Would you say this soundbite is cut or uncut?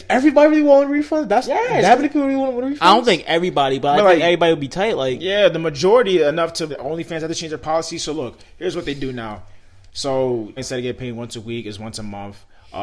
cut